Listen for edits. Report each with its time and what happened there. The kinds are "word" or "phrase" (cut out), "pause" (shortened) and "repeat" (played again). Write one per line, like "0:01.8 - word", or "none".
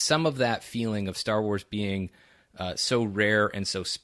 none